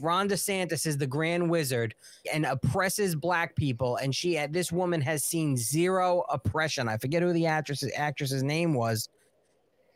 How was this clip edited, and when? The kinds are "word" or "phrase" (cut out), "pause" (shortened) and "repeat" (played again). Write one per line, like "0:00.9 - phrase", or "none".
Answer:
0:02.2 - word